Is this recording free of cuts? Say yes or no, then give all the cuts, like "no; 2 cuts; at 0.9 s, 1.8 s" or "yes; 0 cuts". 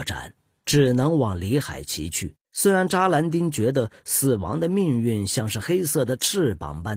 no; 1 cut; at 2.4 s